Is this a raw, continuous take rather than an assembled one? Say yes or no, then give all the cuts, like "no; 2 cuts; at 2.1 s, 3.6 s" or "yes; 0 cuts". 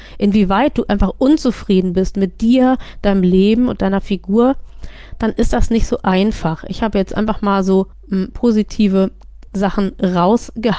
no; 2 cuts; at 7.9 s, 9.5 s